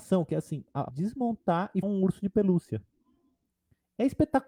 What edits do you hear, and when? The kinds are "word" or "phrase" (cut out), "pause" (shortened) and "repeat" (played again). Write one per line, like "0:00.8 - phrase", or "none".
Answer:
0:00.9 - word
0:01.8 - word